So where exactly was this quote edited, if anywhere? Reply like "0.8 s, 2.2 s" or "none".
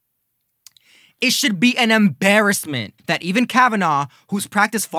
3.0 s